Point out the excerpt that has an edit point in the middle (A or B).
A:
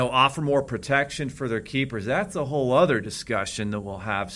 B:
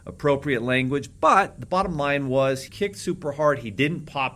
B